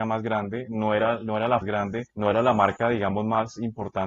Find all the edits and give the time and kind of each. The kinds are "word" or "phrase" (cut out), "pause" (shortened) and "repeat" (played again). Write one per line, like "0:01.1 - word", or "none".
0:01.6 - phrase
0:02.1 - pause